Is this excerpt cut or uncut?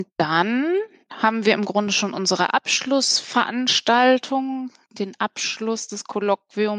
uncut